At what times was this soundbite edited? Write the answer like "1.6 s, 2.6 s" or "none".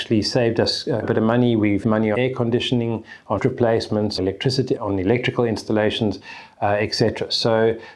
1.0 s, 1.8 s, 2.1 s, 3.4 s, 4.2 s, 4.8 s

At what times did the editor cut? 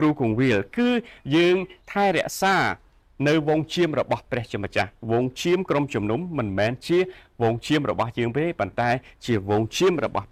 1.8 s

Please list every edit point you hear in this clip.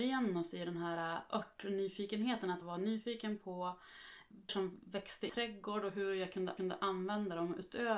2.6 s, 4.5 s, 5.3 s, 6.6 s

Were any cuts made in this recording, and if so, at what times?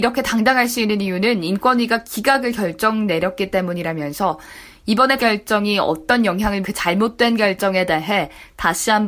5.2 s, 6.6 s

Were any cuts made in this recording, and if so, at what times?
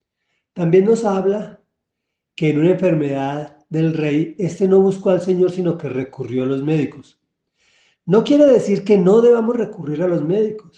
none

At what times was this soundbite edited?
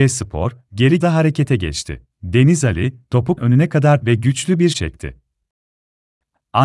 1.0 s, 2.1 s, 3.4 s, 4.0 s, 4.7 s

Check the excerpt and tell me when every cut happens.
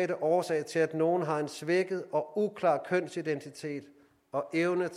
none

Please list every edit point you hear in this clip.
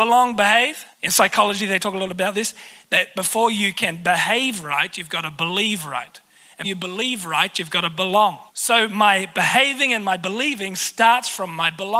0.9 s, 6.6 s, 8.5 s

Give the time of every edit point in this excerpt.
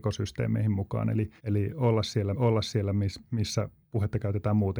1.4 s, 2.3 s

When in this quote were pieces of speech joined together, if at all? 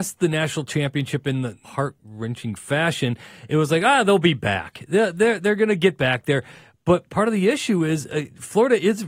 1.6 s

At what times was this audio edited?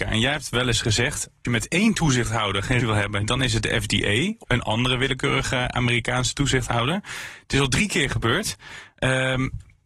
1.4 s, 2.8 s, 4.4 s

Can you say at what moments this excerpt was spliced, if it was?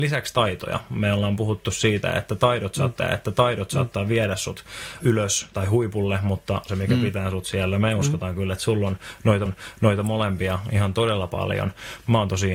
3.0 s, 5.0 s, 6.7 s, 9.5 s

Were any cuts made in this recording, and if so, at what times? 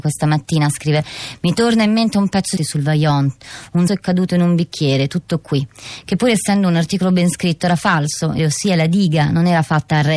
2.6 s, 3.9 s, 8.4 s

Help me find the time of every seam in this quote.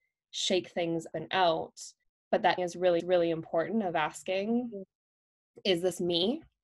1.1 s, 2.0 s, 2.6 s, 3.0 s

